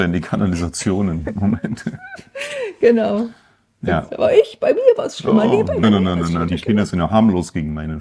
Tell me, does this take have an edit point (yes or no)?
yes